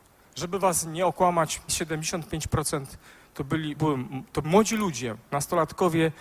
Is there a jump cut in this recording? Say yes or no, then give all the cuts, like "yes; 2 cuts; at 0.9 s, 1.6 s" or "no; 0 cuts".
yes; 3 cuts; at 1.7 s, 3.8 s, 4.4 s